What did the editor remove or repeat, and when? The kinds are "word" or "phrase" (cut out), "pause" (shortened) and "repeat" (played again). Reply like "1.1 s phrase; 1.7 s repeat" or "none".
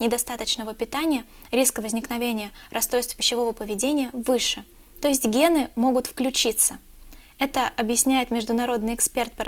4.8 s pause

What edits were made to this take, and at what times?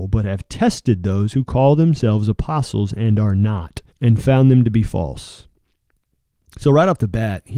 3.9 s pause

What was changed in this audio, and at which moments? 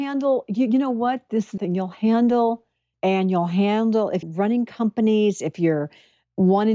1.6 s word; 2.9 s word; 4.2 s word

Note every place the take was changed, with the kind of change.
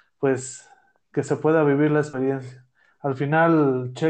none

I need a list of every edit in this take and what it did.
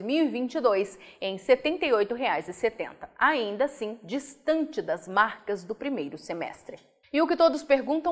7.0 s pause

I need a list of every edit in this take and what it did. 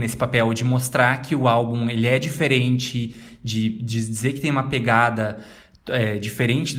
none

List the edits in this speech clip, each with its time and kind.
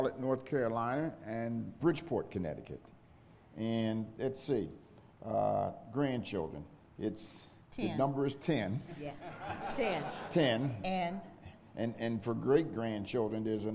1.8 s phrase

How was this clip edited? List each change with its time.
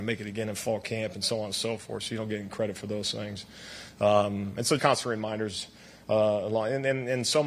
4.8 s word

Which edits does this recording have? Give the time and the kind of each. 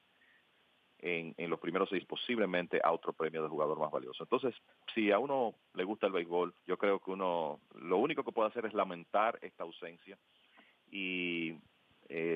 2.0 s word; 6.6 s pause; 7.7 s word

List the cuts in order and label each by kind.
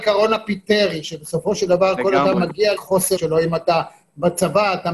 2.8 s word; 3.2 s word

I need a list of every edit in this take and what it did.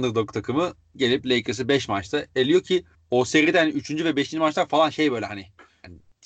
2.9 s pause

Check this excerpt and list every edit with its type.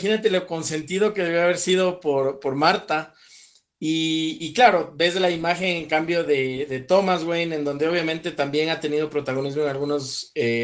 none

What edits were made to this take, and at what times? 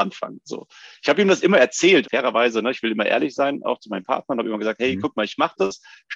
2.0 s word

